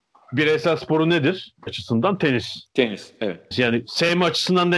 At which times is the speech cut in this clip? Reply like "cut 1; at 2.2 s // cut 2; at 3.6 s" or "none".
cut 1; at 1.7 s // cut 2; at 3.5 s